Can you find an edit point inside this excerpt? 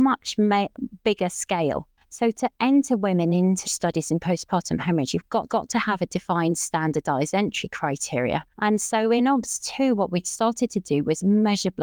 yes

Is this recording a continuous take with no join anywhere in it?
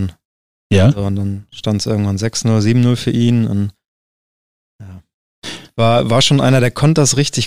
yes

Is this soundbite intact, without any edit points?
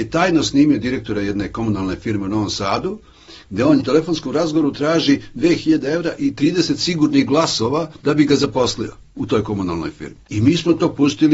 no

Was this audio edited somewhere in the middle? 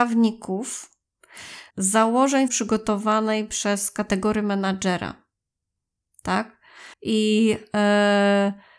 yes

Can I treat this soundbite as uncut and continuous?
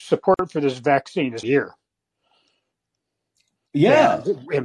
no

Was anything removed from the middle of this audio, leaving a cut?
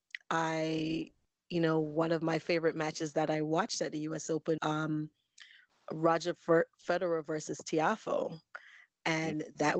yes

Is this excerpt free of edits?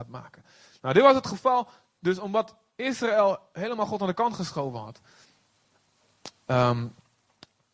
yes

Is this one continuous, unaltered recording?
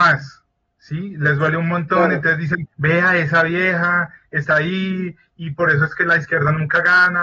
no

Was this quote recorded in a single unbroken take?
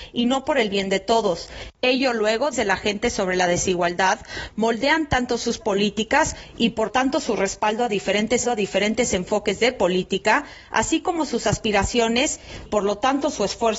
no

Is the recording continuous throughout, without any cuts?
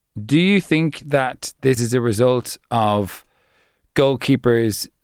no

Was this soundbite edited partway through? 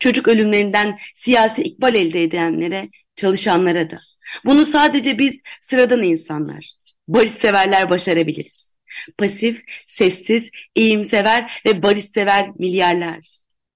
no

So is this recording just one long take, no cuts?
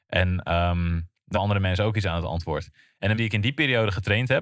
no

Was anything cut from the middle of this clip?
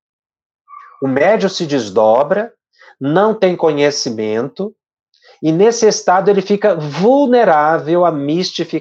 no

